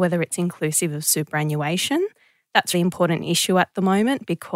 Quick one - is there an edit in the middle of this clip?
yes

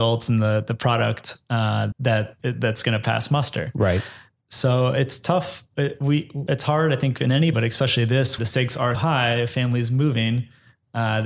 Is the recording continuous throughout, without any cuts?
no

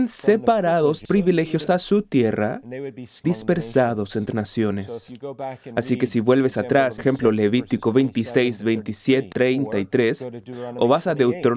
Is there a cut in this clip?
yes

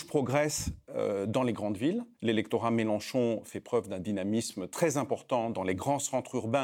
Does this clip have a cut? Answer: yes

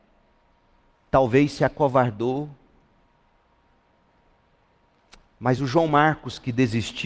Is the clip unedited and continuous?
yes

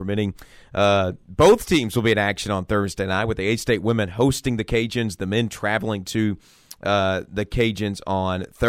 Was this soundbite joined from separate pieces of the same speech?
no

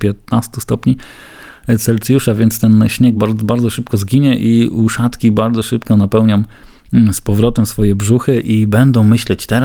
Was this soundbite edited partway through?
no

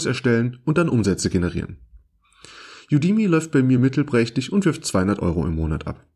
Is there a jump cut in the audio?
no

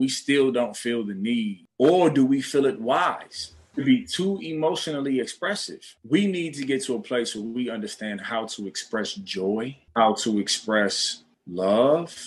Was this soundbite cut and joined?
no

